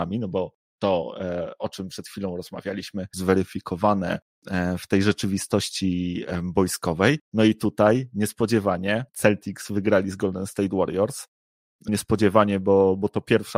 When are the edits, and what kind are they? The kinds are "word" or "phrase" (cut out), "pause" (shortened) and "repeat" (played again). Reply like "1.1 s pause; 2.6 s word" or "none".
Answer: 3.1 s phrase; 7.2 s pause; 9.1 s pause; 11.9 s word